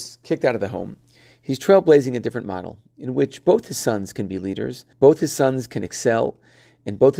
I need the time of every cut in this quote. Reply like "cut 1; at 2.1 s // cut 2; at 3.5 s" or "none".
cut 1; at 4.9 s

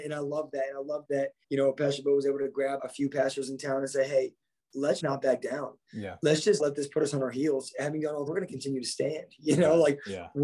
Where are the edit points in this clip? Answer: cut 1; at 1.0 s // cut 2; at 1.4 s // cut 3; at 2.8 s // cut 4; at 5.0 s // cut 5; at 6.6 s // cut 6; at 8.3 s

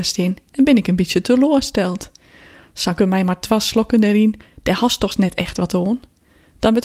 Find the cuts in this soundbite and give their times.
cut 1; at 3.0 s

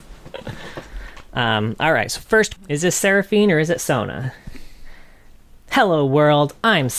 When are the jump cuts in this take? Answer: cut 1; at 2.6 s

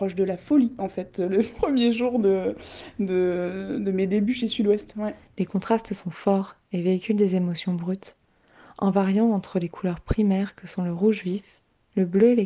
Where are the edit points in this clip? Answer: none

